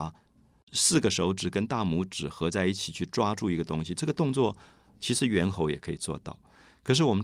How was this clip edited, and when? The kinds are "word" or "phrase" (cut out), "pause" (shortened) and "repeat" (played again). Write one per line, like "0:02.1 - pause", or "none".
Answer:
none